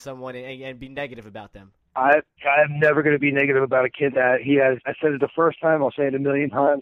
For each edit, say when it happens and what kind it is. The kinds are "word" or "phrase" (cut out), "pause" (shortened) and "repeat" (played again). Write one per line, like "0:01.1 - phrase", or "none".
0:04.1 - word
0:04.8 - word